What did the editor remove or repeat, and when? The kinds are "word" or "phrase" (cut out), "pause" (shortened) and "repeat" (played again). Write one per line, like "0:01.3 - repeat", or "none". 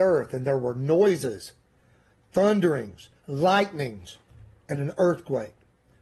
0:03.2 - pause